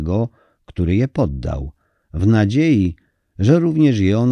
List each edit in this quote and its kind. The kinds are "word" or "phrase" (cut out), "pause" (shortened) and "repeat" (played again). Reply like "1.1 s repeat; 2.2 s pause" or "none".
none